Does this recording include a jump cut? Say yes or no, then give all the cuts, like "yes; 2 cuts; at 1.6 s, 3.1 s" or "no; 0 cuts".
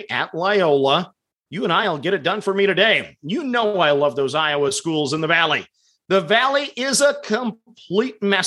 no; 0 cuts